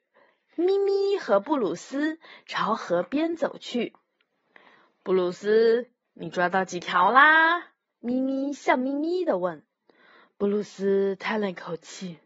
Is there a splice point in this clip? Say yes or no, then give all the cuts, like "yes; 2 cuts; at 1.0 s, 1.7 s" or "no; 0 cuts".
no; 0 cuts